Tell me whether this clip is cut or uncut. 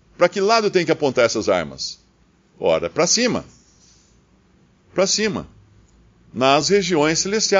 uncut